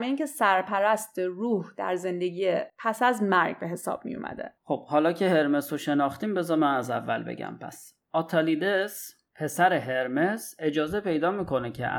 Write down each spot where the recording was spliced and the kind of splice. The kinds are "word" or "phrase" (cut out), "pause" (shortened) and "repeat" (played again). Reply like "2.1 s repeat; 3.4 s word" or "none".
4.6 s pause; 9.3 s pause

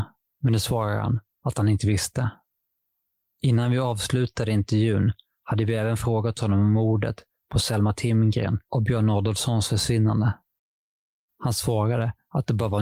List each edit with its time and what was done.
8.6 s pause

